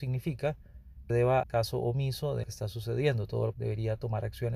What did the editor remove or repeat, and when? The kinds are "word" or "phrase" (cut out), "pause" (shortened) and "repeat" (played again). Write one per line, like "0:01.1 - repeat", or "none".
0:01.1 - word
0:01.4 - word
0:02.4 - word
0:03.5 - word